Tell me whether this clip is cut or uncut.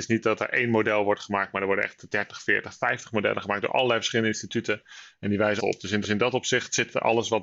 cut